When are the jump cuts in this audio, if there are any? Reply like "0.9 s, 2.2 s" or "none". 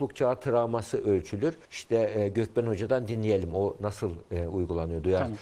1.6 s